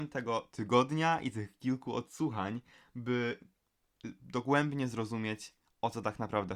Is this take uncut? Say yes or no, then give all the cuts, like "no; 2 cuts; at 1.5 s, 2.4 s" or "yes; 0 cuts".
yes; 0 cuts